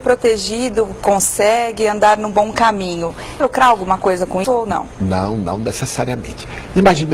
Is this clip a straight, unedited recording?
no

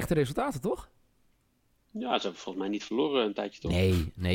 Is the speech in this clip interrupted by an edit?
no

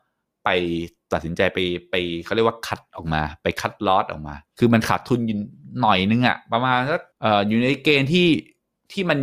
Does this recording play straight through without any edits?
no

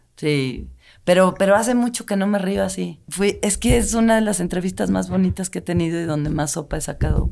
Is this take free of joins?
yes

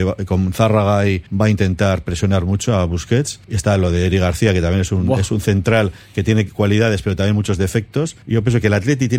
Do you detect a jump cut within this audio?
yes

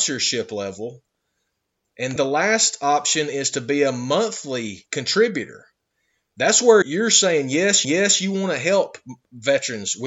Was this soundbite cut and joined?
yes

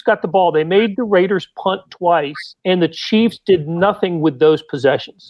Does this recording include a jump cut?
yes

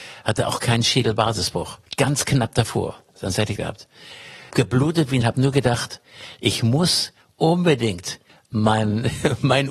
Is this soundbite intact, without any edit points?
no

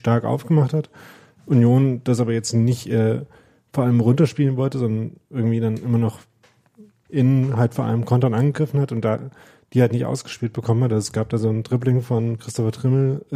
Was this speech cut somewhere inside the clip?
no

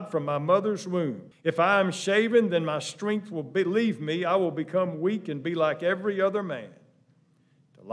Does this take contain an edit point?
yes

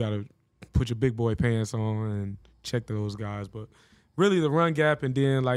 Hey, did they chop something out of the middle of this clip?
no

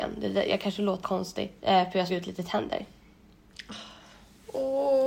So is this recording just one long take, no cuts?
no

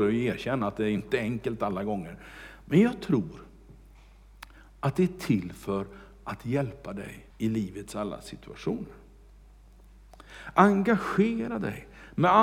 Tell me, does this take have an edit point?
yes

